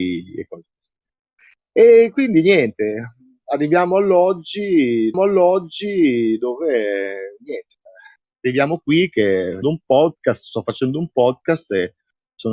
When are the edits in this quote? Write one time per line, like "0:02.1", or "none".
0:05.1
0:09.6